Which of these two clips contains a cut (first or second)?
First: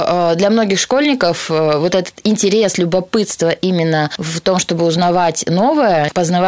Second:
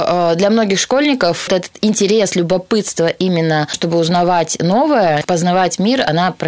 second